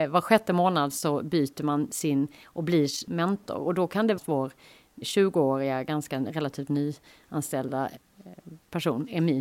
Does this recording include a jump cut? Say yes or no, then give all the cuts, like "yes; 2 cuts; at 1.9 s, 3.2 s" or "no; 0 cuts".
yes; 3 cuts; at 3.1 s, 4.2 s, 5.0 s